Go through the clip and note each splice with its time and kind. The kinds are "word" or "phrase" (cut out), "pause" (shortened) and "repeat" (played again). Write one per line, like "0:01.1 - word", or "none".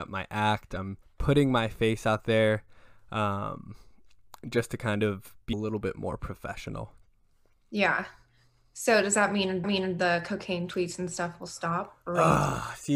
0:01.0 - pause
0:05.5 - word
0:09.6 - repeat